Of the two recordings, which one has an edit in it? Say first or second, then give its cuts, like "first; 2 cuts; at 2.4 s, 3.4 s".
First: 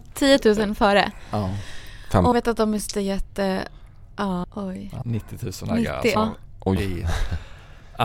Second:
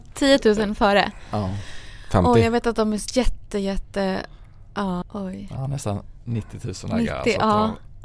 first; 5 cuts; at 2.3 s, 2.9 s, 5.0 s, 6.2 s, 6.8 s